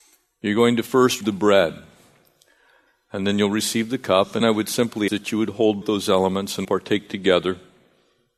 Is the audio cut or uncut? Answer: cut